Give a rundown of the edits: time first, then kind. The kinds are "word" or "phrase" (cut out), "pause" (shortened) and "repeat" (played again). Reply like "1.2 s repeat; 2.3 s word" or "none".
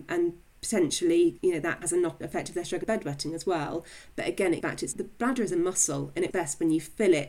1.8 s word; 2.2 s word; 2.8 s word; 4.6 s word; 4.9 s word; 6.3 s word